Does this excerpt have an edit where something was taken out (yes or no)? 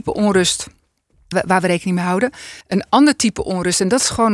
yes